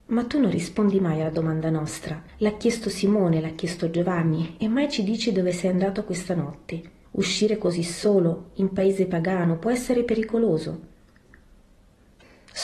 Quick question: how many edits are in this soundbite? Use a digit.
2